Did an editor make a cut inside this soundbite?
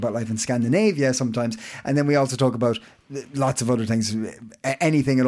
no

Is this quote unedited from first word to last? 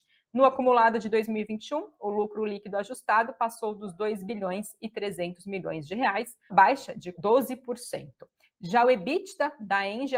no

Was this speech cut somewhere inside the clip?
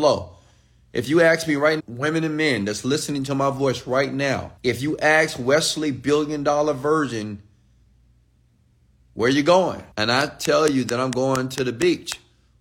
yes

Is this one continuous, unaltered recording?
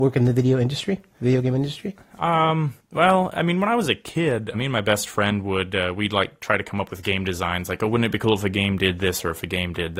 no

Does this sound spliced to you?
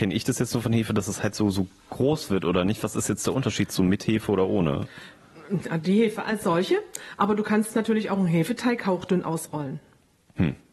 no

